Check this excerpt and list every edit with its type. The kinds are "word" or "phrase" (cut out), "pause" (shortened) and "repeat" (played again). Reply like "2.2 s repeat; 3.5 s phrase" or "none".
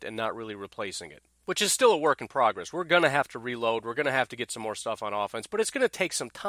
none